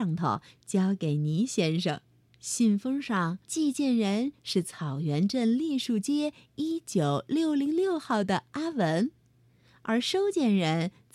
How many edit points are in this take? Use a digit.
2